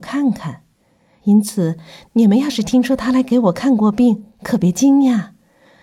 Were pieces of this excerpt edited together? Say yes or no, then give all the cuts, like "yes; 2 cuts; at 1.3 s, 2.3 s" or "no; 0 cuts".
no; 0 cuts